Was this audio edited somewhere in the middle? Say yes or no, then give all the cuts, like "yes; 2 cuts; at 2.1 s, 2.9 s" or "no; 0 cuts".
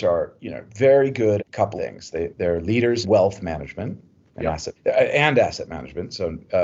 yes; 5 cuts; at 1.4 s, 1.8 s, 2.3 s, 3.0 s, 4.8 s